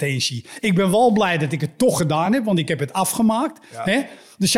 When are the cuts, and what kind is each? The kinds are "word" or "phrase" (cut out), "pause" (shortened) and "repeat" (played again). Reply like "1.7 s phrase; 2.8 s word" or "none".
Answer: none